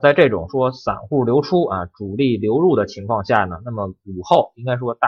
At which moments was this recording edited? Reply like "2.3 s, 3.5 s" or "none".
none